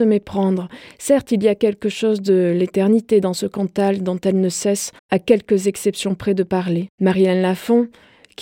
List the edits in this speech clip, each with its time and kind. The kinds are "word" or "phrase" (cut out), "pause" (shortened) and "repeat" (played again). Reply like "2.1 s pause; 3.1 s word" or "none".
5.0 s pause; 6.9 s pause